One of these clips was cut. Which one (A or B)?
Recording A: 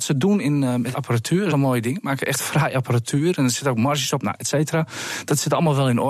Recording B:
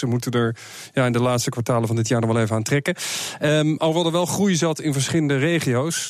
A